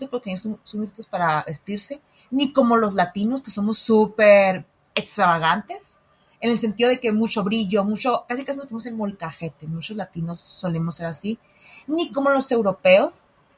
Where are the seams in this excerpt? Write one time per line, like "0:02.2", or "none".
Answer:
none